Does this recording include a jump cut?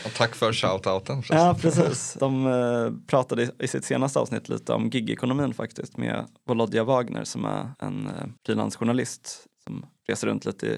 yes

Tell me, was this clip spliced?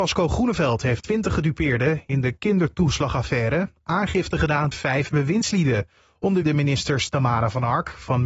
yes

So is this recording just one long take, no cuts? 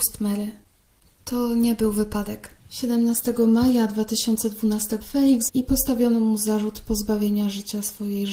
no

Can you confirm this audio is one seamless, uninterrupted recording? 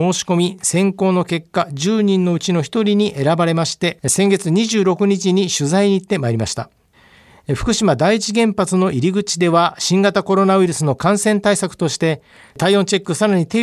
yes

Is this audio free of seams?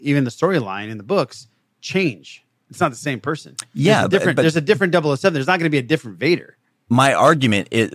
yes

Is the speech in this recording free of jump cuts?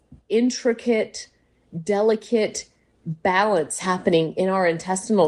yes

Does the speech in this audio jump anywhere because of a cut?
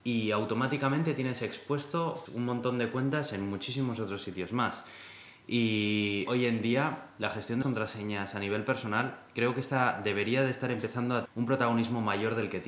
yes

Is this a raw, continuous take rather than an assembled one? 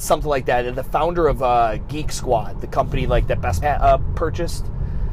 no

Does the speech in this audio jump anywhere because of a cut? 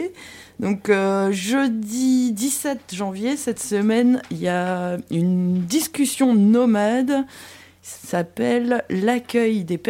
no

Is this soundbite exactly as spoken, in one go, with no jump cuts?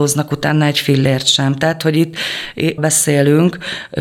no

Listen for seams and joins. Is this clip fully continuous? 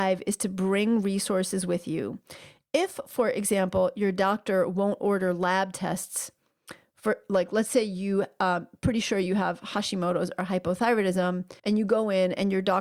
no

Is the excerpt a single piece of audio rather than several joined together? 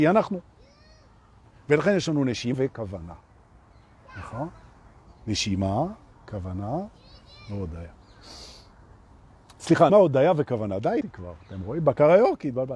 no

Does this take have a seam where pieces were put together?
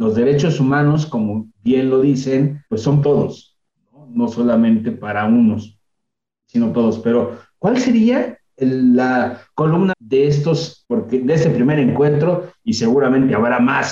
yes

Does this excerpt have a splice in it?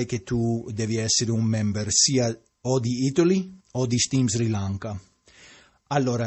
yes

